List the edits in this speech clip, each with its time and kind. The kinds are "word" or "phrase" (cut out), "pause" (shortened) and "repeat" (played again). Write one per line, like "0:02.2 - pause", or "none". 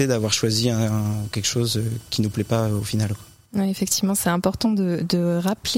none